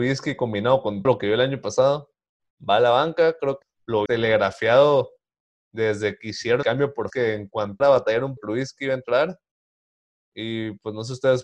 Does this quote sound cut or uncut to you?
cut